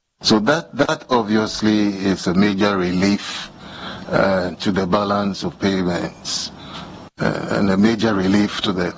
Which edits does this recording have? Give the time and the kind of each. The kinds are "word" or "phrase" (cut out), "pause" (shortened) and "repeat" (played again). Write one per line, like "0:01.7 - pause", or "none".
none